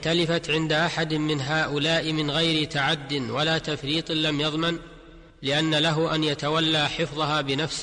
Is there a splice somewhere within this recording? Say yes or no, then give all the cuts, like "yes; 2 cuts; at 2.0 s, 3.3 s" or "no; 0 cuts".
yes; 1 cut; at 5.3 s